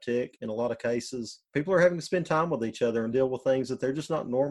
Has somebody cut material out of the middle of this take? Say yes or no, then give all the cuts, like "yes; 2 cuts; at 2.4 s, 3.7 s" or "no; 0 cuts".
no; 0 cuts